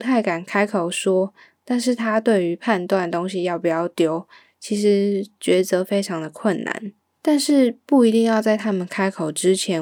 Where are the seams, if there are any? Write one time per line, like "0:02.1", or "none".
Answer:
0:07.0